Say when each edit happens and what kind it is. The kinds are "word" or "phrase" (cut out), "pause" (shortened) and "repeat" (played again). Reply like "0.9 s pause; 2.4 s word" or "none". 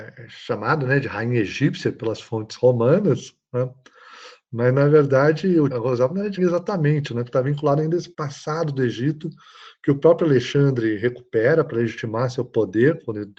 5.7 s phrase; 6.4 s word; 8.1 s pause